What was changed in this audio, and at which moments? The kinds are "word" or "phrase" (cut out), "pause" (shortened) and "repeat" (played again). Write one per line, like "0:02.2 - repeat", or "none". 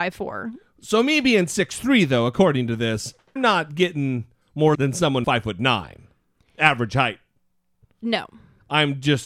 0:03.4 - word
0:04.7 - word
0:05.2 - word